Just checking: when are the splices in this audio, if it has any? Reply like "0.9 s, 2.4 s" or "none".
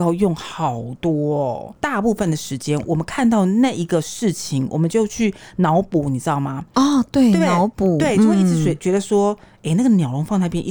none